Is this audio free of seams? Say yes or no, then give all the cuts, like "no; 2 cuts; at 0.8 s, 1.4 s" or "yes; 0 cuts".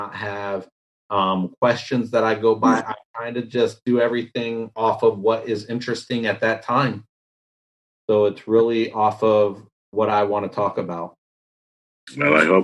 yes; 0 cuts